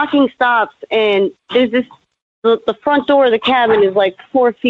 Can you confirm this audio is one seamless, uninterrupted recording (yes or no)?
yes